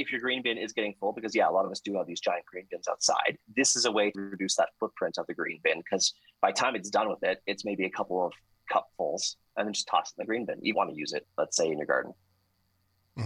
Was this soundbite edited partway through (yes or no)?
yes